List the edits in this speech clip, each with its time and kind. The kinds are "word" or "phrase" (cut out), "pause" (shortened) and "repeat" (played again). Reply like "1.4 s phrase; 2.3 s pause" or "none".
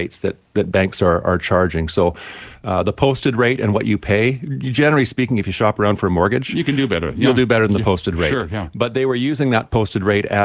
none